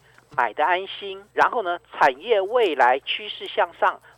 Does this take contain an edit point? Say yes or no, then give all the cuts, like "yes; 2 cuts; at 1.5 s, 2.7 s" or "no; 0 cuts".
yes; 1 cut; at 1.3 s